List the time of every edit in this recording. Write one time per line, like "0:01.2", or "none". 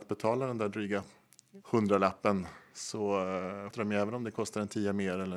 0:01.6
0:03.7